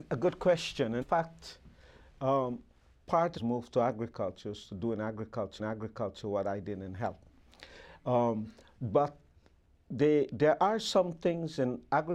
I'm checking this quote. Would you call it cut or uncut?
cut